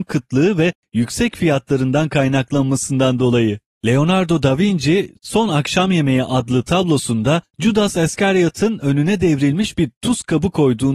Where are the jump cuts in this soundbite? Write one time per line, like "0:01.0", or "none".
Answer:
none